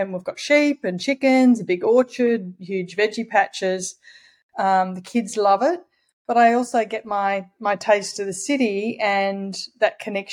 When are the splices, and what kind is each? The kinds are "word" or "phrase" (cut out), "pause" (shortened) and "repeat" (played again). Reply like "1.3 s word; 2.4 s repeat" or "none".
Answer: none

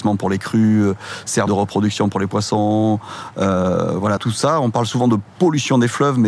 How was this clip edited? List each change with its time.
1.5 s phrase; 4.2 s word

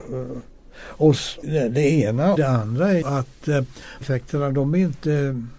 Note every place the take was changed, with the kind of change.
1.4 s word; 2.4 s word; 3.0 s word; 4.0 s phrase

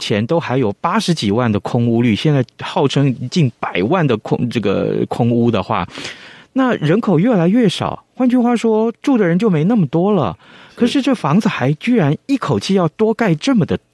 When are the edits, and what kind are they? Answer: none

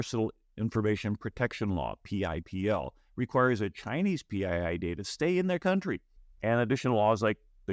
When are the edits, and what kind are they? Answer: 6.2 s pause

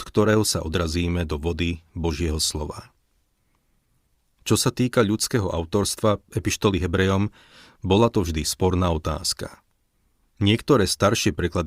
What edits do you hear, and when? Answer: none

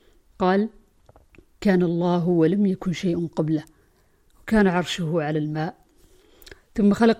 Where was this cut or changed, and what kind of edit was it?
none

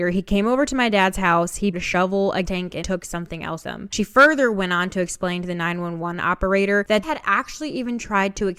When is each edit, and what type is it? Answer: 1.7 s word; 2.4 s word; 2.8 s word; 3.6 s word; 7.0 s word

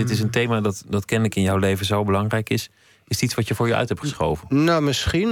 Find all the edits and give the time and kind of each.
none

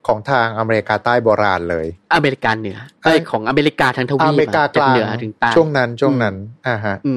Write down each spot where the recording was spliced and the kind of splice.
2.0 s pause

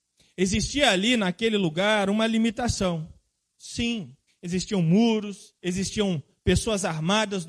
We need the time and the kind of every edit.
4.3 s pause; 5.6 s pause

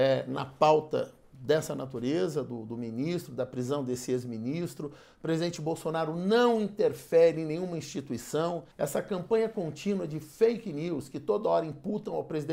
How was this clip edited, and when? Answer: 8.7 s pause

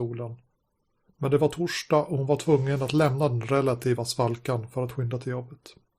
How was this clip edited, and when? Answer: none

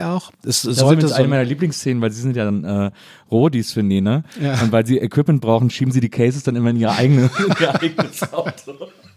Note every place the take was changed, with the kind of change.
none

